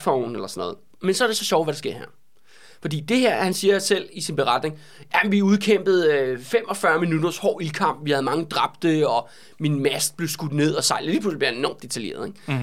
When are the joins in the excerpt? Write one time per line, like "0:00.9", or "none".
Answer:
none